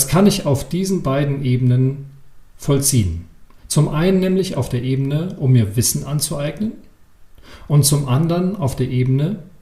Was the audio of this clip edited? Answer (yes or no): no